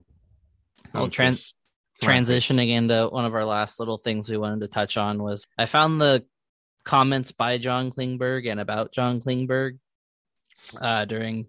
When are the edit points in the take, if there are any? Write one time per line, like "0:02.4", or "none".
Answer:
0:05.4

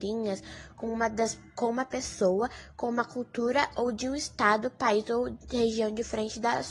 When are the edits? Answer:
none

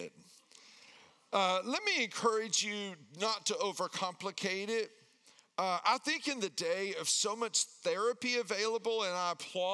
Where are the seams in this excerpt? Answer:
none

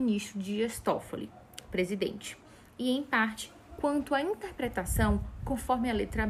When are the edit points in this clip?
none

